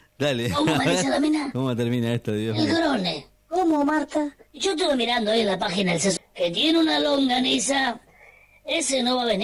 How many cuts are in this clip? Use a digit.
3